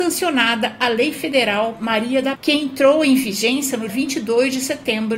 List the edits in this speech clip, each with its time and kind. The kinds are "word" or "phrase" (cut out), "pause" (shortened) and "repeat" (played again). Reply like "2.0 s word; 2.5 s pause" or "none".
2.3 s word; 3.9 s word